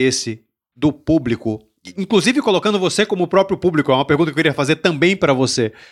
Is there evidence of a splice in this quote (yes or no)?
no